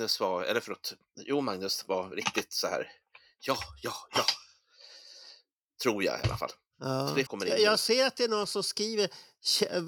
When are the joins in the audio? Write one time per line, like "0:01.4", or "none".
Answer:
0:07.3